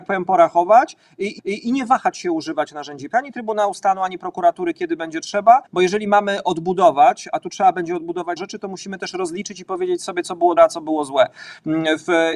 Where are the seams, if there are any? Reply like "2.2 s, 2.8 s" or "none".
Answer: 1.4 s, 3.1 s, 5.7 s, 8.4 s, 10.6 s